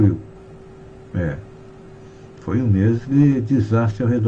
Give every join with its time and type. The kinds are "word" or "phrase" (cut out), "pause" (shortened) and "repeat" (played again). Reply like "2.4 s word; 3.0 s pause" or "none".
none